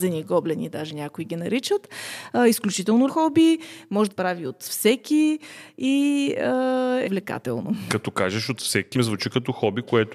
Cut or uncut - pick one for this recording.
cut